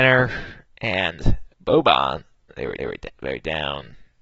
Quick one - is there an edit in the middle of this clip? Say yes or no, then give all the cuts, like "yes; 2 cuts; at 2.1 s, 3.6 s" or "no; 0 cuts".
yes; 2 cuts; at 1.5 s, 2.8 s